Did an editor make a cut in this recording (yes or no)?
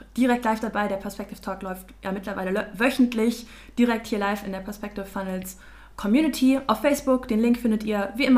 no